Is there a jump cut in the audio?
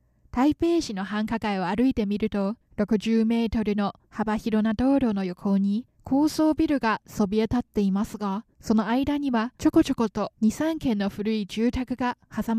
yes; 5 cuts; at 2.6 s, 5.9 s, 8.5 s, 9.6 s, 10.4 s

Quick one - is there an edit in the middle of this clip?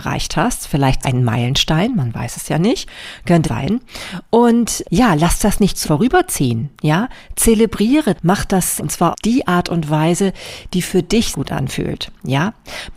yes; 8 cuts; at 1.0 s, 3.4 s, 4.8 s, 5.8 s, 8.2 s, 8.8 s, 9.1 s, 11.3 s

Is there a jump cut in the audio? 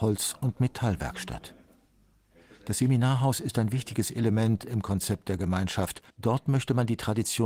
yes; 1 cut; at 6.1 s

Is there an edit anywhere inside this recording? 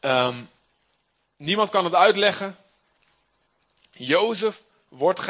no; 0 cuts

